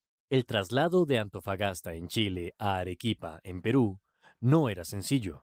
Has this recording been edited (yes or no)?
no